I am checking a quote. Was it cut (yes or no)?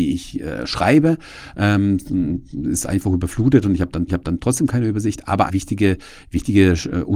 yes